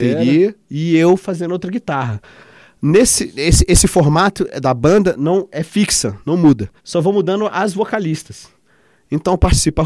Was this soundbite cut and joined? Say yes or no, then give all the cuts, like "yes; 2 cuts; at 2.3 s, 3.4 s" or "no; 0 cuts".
yes; 1 cut; at 6.8 s